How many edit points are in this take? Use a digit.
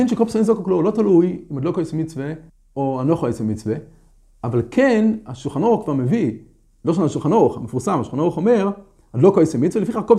1